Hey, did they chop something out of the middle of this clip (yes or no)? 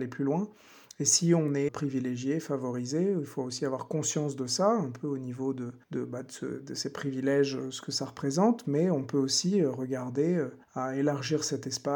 yes